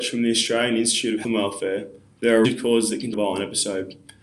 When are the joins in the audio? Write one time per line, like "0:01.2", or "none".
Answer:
0:01.2
0:02.4
0:03.1